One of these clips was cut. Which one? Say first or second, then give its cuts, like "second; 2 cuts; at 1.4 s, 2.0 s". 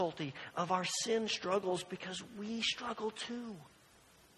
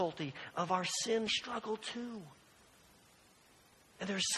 second; 1 cut; at 1.3 s